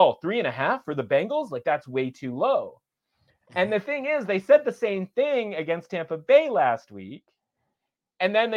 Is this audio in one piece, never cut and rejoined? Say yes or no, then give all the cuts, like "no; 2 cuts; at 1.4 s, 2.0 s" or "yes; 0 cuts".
yes; 0 cuts